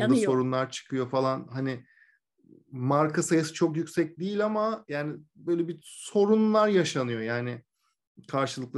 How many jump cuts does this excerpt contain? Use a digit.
0